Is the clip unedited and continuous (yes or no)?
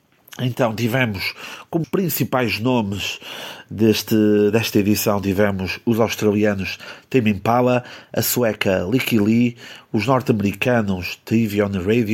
no